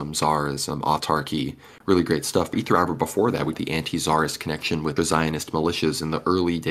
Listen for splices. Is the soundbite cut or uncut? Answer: cut